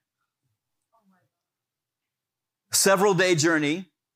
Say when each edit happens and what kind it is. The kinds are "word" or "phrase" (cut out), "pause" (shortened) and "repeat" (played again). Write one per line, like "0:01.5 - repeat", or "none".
none